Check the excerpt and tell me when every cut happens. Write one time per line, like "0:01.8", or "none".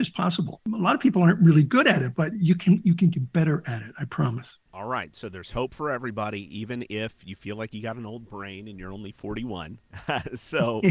none